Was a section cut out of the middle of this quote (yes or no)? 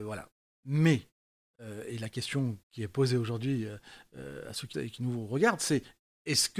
yes